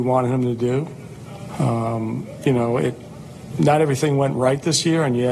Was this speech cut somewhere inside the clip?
no; 0 cuts

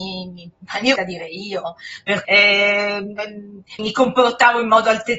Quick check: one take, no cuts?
no; 3 cuts; at 1.0 s, 2.2 s, 3.8 s

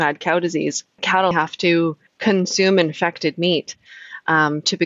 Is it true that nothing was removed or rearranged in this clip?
no; 3 cuts; at 1.0 s, 1.3 s, 2.1 s

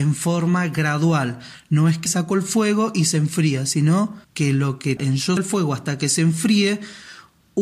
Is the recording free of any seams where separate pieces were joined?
no; 4 cuts; at 2.1 s, 4.2 s, 5.0 s, 5.4 s

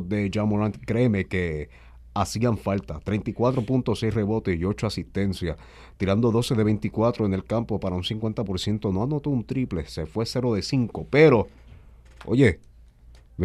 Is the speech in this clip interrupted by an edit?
no; 0 cuts

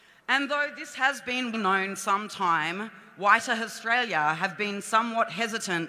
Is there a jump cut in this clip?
yes; 2 cuts; at 1.5 s, 2.0 s

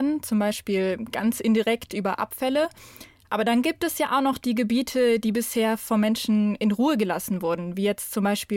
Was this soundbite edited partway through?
no; 0 cuts

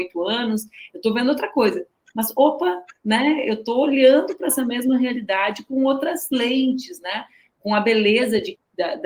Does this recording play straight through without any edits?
yes; 0 cuts

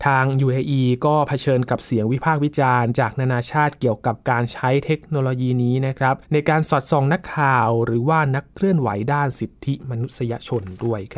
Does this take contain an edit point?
yes; 1 cut; at 6.2 s

